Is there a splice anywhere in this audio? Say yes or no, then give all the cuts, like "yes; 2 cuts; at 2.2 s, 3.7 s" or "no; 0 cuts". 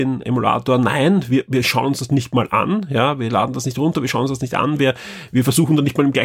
no; 0 cuts